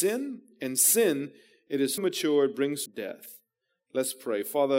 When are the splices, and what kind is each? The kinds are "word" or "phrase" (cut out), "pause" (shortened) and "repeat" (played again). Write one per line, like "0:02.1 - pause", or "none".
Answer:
0:02.0 - word
0:02.9 - word